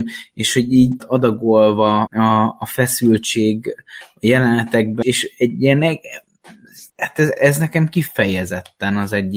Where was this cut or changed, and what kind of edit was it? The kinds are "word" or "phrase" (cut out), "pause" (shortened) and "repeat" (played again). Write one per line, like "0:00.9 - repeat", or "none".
0:01.0 - phrase
0:02.1 - word
0:05.0 - word
0:06.9 - pause
0:07.4 - word